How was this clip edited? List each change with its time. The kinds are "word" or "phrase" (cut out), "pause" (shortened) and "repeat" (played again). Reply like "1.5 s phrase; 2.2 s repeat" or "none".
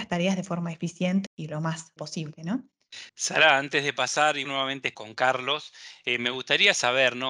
1.3 s word; 2.0 s word; 3.1 s pause; 4.4 s word; 4.9 s word